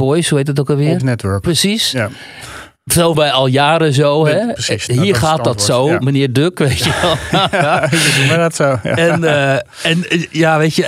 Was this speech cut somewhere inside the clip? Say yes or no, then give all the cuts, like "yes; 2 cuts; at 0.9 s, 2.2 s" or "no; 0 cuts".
yes; 2 cuts; at 1.0 s, 3.1 s